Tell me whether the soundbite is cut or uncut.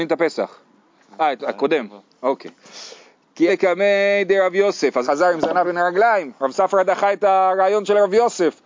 cut